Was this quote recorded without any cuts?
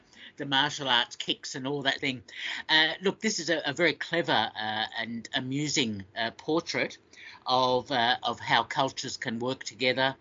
no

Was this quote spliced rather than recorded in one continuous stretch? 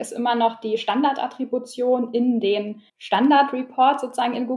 yes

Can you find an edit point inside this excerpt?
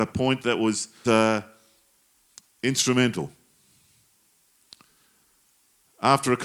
yes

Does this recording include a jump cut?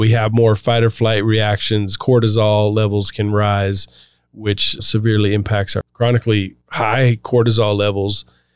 yes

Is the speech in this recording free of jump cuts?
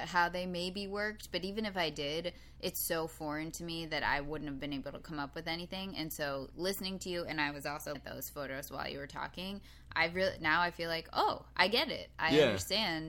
no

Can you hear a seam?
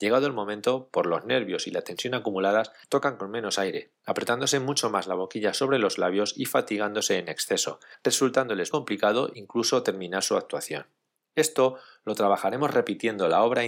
yes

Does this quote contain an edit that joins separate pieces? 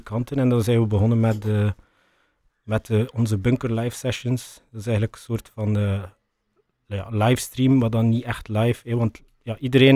no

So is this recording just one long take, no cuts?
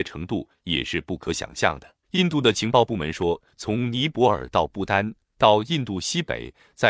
no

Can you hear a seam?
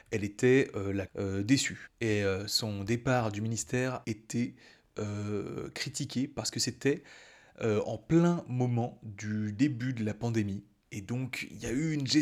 yes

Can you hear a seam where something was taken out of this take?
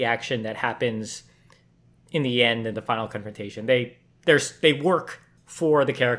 yes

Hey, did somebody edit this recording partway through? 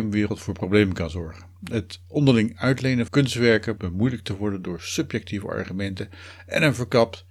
yes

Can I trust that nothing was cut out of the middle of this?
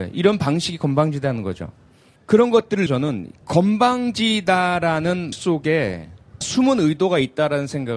no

